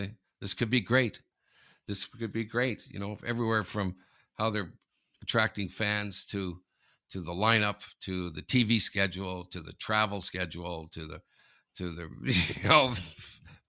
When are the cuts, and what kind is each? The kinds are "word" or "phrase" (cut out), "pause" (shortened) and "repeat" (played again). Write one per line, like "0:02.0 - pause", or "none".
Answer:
none

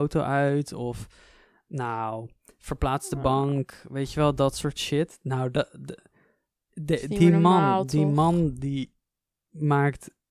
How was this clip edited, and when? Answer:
none

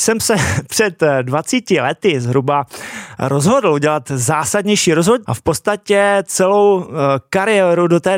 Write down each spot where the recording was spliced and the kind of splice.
0:05.3 - word

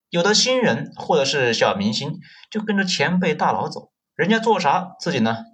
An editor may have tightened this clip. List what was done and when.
none

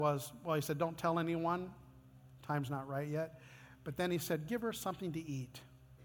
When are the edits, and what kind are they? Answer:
none

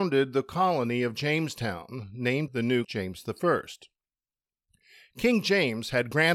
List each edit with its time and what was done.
0:02.5 - word
0:02.8 - word

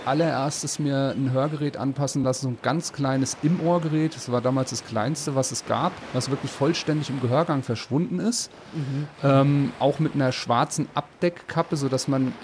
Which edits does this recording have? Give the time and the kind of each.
none

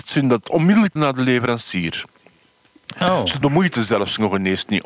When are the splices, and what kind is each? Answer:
0:01.0 - word
0:03.4 - word

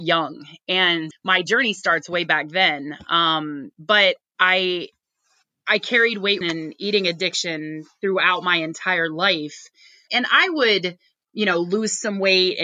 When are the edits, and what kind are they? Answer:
0:01.1 - word
0:06.4 - word
0:10.1 - word

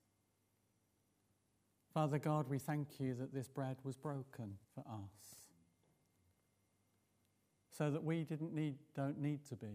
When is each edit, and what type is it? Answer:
0:04.6 - pause

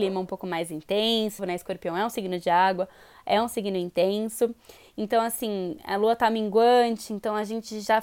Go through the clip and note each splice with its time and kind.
0:01.4 - phrase

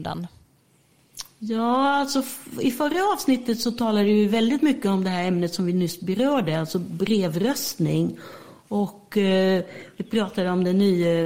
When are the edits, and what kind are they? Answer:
none

